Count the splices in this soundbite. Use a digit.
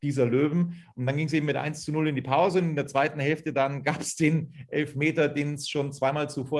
0